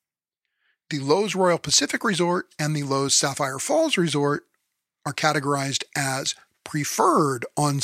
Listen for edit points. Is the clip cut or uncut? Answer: uncut